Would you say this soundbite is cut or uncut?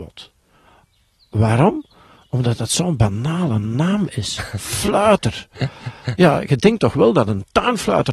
uncut